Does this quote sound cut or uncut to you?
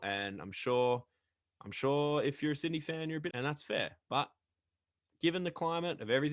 cut